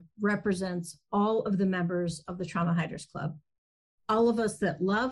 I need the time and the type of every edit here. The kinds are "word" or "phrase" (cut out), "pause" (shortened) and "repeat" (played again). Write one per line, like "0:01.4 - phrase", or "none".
none